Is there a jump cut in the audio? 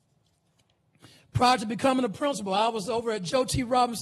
no; 0 cuts

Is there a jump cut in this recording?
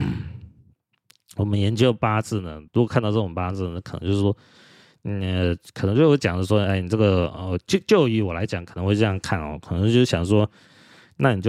yes; 1 cut; at 2.7 s

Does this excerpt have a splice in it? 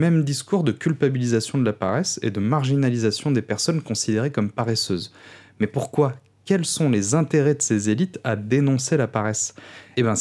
no; 0 cuts

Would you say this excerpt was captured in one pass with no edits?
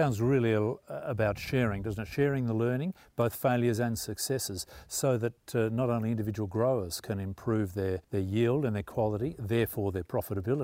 no; 1 cut; at 8.0 s

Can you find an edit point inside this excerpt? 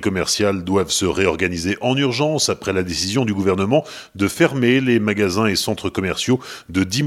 no; 0 cuts

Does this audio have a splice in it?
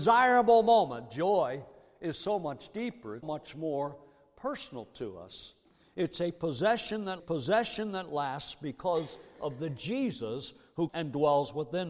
yes; 3 cuts; at 3.2 s, 7.2 s, 10.9 s

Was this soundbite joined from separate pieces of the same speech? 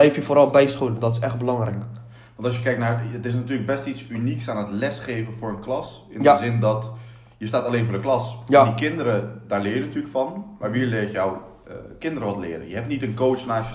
no; 0 cuts

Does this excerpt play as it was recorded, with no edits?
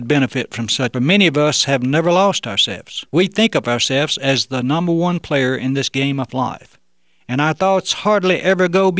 no; 2 cuts; at 0.9 s, 3.1 s

